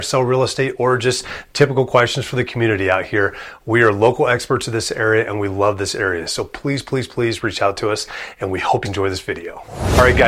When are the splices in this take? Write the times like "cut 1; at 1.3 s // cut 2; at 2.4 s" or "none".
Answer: cut 1; at 8.8 s